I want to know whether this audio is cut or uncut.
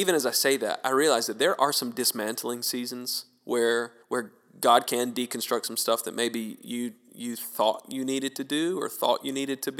cut